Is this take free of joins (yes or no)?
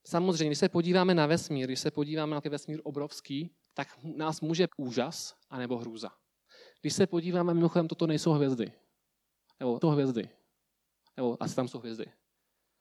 no